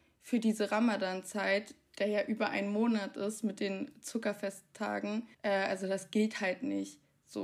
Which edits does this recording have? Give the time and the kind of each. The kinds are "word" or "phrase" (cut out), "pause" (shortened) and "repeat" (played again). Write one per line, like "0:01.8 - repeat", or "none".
0:05.3 - pause